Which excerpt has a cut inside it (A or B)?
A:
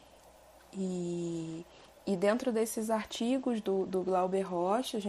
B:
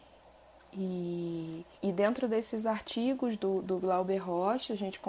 B